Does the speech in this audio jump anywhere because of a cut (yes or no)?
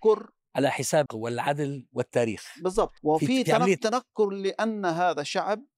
yes